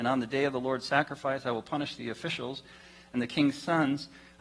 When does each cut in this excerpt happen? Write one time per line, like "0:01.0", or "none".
none

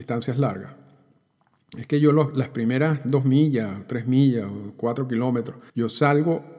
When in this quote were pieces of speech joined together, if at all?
0:05.7

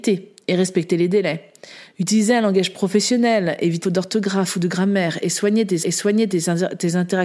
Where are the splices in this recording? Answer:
0:03.8
0:05.8

